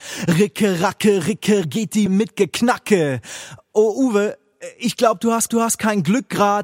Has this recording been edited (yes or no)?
yes